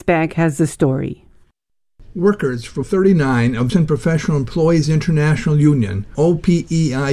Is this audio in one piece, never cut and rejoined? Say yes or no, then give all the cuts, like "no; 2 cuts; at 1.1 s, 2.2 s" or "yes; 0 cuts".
no; 3 cuts; at 2.8 s, 3.7 s, 6.1 s